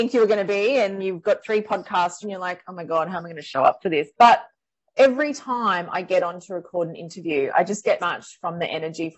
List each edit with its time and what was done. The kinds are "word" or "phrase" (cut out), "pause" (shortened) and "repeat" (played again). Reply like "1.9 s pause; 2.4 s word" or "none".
1.0 s word; 1.4 s word; 2.2 s phrase; 4.1 s pause; 8.0 s word